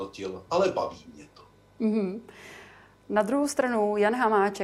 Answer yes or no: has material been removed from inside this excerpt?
no